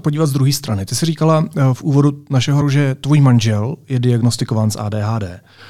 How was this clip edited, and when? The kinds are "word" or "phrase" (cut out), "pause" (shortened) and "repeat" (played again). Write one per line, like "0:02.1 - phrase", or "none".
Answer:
0:02.6 - word